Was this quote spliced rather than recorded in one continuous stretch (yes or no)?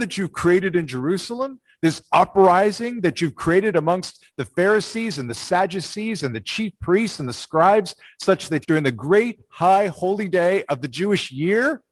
yes